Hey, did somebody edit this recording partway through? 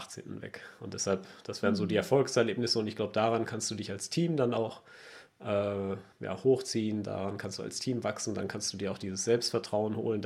yes; 1 cut; at 6.1 s

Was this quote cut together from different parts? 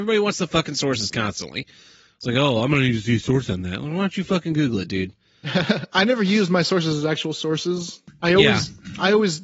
no; 0 cuts

